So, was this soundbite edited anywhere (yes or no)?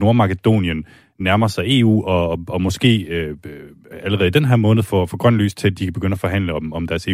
no